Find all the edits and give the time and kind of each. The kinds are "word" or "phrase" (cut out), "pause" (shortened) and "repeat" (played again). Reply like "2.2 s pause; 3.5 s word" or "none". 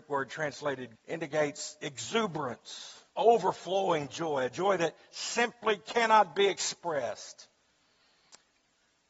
1.0 s word; 3.1 s pause